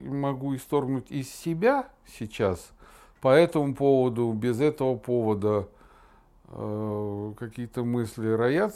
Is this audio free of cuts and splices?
yes; 0 cuts

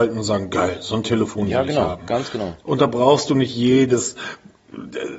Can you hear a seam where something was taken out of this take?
no; 0 cuts

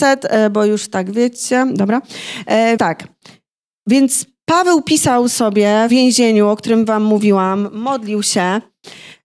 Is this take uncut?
no; 2 cuts; at 2.8 s, 5.9 s

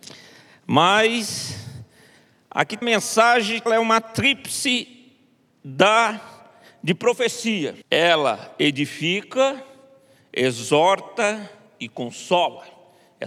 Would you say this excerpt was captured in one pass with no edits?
no; 3 cuts; at 2.8 s, 3.7 s, 7.8 s

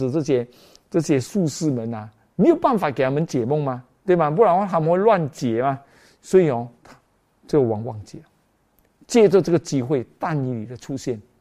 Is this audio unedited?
no; 1 cut; at 7.1 s

